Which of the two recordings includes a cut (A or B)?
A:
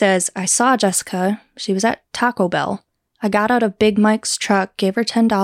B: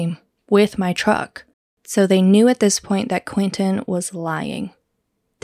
B